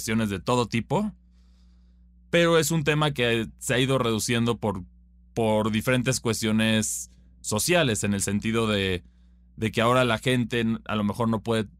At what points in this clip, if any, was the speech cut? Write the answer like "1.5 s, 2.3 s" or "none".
none